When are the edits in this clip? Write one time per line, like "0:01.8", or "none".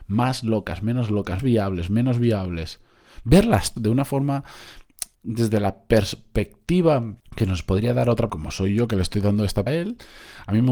0:01.4
0:03.8
0:05.1
0:07.2
0:08.3
0:09.7